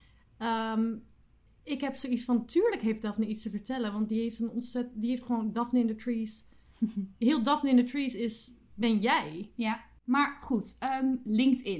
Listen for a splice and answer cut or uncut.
uncut